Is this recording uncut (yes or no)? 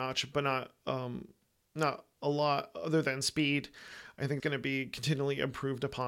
no